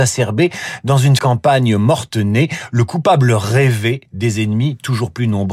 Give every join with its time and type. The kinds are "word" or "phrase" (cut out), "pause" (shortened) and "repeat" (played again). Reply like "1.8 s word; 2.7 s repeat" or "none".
1.2 s phrase